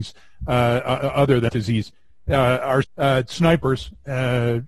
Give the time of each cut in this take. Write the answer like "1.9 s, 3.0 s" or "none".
1.5 s, 2.8 s